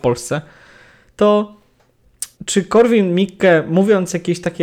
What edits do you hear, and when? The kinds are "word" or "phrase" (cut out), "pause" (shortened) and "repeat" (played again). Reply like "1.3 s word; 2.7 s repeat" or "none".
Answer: 2.3 s pause